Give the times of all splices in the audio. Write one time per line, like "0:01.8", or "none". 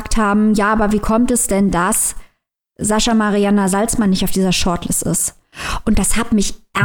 none